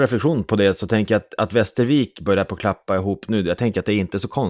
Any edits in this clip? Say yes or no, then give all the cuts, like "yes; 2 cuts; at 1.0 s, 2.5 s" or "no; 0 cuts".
no; 0 cuts